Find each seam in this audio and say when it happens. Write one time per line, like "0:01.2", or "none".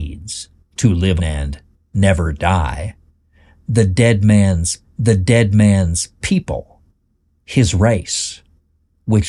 0:01.2
0:04.8